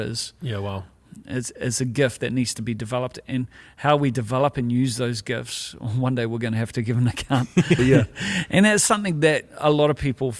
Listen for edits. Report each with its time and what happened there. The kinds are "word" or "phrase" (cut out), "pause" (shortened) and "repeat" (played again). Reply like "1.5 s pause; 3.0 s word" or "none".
7.8 s word